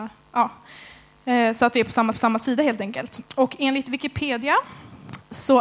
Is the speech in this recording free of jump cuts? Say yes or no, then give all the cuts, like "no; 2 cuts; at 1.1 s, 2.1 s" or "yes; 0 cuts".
no; 2 cuts; at 2.1 s, 3.3 s